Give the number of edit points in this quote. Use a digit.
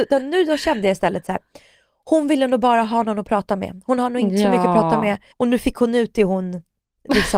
1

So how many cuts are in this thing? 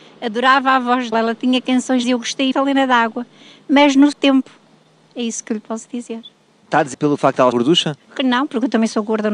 6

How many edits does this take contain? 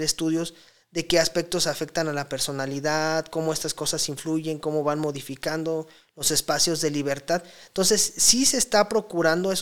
0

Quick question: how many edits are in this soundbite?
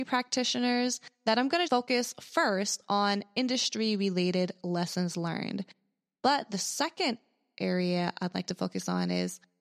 1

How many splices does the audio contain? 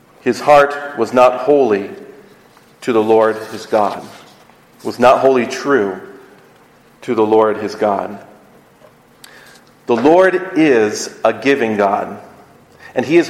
0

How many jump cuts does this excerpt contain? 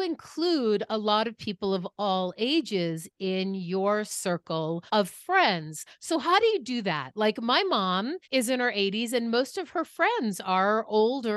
2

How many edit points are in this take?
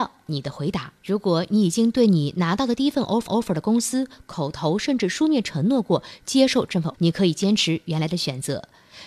3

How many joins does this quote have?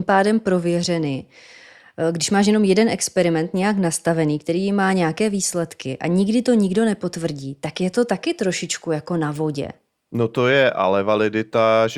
0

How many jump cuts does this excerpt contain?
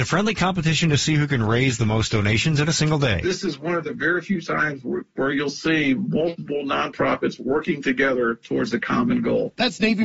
0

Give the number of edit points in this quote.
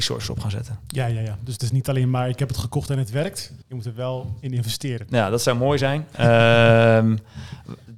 1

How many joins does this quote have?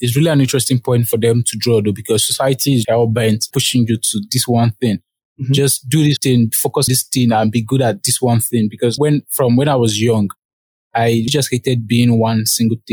6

